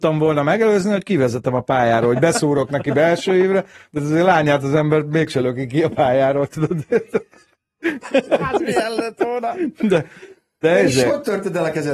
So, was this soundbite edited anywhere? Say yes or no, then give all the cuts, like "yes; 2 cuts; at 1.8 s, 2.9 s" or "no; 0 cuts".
no; 0 cuts